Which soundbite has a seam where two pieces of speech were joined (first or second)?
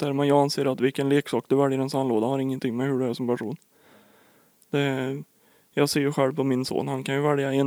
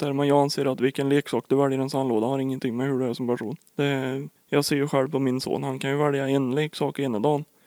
second